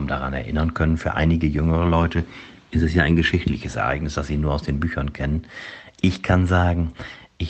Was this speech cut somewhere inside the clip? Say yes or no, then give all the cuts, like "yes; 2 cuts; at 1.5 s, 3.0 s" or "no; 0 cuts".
no; 0 cuts